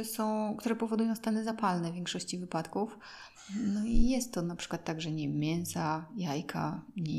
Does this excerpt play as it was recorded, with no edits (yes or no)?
yes